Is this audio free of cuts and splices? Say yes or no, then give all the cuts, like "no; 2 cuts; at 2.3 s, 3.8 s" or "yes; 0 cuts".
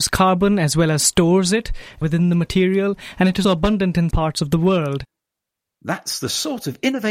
no; 2 cuts; at 3.4 s, 4.1 s